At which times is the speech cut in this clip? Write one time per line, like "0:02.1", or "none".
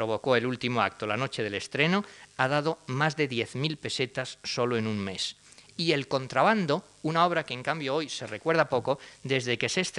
none